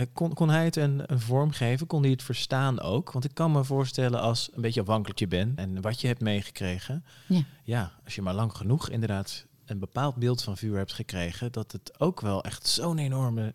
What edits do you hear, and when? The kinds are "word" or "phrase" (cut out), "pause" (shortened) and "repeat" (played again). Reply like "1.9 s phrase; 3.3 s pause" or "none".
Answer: 1.1 s word; 5.2 s phrase; 5.6 s word